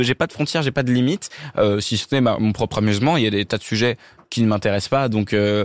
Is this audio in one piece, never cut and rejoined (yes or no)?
yes